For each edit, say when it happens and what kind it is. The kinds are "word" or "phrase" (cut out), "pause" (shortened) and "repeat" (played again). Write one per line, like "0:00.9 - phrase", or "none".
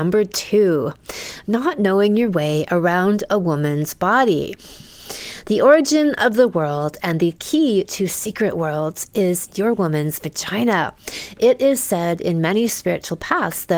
none